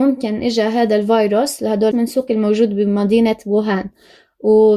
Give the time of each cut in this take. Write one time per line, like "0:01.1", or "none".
0:01.9
0:02.3